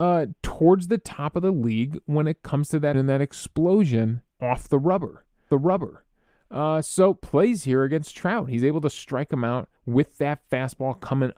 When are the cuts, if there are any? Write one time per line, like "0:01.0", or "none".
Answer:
0:02.9
0:04.3
0:05.5
0:07.2
0:09.8